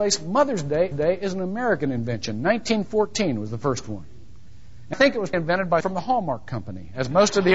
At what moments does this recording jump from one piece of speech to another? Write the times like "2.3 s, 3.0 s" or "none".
0.9 s, 4.9 s, 5.3 s, 5.8 s